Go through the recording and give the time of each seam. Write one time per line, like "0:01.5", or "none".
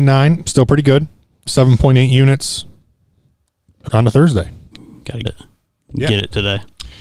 0:01.5
0:03.9
0:04.7
0:05.3

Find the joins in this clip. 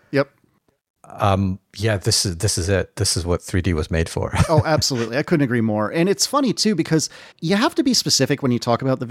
0:07.3

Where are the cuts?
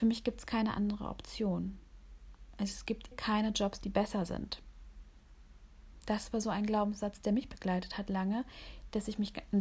0:03.1

